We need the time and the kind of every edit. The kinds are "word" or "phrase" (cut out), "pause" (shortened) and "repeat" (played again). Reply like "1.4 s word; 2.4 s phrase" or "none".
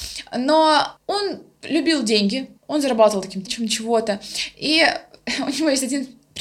1.0 s pause; 2.6 s pause; 3.5 s word